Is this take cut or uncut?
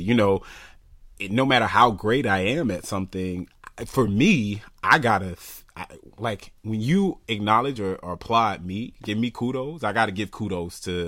uncut